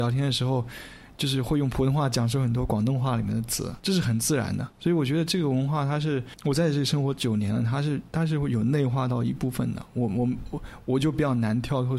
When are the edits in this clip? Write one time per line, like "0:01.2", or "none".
0:03.8